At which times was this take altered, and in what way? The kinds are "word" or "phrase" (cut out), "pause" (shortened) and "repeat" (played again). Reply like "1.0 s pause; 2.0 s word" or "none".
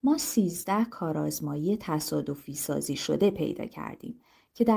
none